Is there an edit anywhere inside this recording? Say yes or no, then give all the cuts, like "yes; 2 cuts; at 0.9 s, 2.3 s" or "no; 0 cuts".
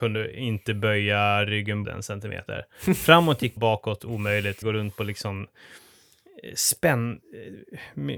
yes; 3 cuts; at 1.8 s, 3.6 s, 4.6 s